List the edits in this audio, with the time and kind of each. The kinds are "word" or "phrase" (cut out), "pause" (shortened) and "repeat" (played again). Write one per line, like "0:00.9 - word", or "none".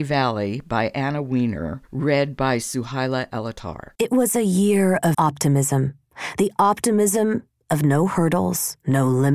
0:01.9 - pause
0:03.9 - pause
0:05.1 - word